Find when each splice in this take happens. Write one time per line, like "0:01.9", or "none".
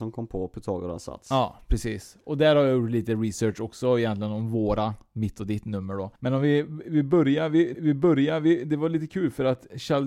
0:06.2
0:07.7